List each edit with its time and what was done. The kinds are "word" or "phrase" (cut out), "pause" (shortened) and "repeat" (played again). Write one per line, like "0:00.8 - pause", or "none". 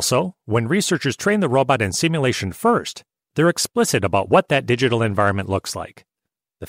none